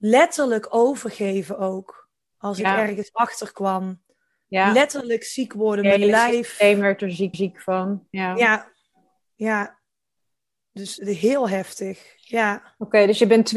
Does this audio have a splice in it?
yes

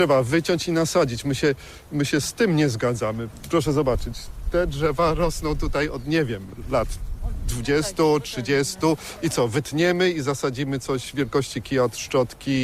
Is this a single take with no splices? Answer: yes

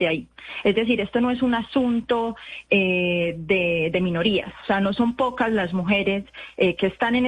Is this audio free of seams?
yes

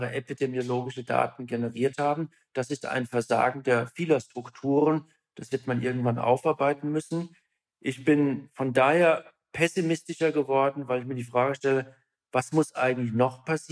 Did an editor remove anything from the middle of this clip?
no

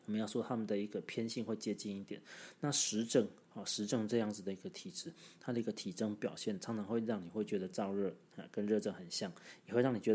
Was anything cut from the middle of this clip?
yes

